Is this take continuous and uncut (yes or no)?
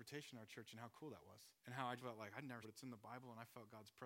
no